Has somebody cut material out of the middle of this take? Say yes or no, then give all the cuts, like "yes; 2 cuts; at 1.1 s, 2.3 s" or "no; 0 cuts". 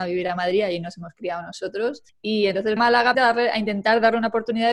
yes; 3 cuts; at 2.1 s, 2.8 s, 3.1 s